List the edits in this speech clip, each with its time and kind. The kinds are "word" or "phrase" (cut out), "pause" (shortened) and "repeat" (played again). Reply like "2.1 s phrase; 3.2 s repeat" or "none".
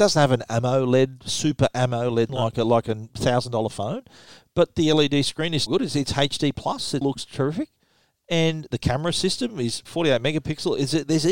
2.3 s word; 5.7 s word; 7.0 s word; 9.9 s word

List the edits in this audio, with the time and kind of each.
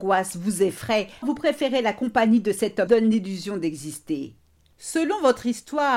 1.2 s word; 2.9 s phrase

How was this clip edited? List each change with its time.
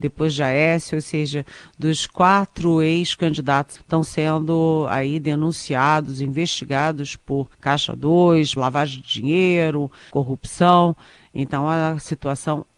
3.7 s phrase; 7.5 s pause; 8.6 s word; 10.1 s phrase

